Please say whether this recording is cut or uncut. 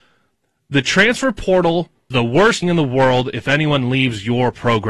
cut